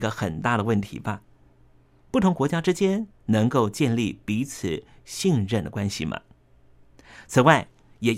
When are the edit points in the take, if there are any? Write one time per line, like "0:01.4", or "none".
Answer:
none